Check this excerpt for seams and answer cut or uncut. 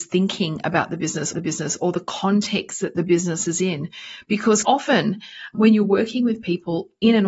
cut